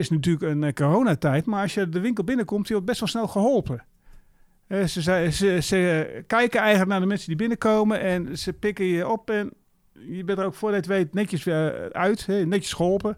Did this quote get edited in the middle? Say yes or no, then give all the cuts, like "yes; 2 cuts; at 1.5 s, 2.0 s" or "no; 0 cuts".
no; 0 cuts